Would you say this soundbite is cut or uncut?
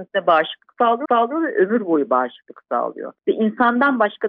cut